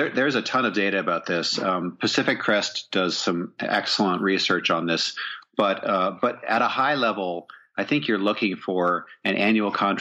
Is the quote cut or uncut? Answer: uncut